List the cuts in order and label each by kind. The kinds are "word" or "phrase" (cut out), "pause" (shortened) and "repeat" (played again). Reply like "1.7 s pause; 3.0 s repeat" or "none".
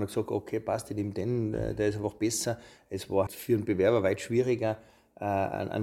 3.3 s word